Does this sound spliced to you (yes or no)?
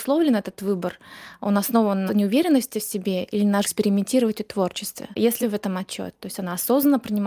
yes